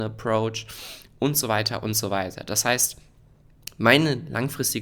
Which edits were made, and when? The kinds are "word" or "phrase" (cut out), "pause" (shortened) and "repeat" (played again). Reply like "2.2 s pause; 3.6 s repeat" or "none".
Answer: none